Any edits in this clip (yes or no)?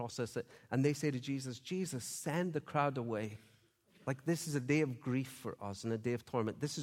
no